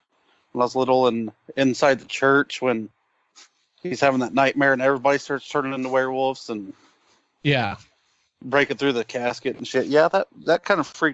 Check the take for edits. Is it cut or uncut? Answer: uncut